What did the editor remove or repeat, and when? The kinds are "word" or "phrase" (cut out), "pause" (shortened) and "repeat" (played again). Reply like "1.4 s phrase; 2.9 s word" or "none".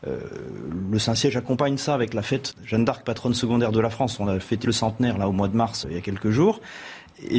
2.5 s word; 4.6 s word; 5.8 s word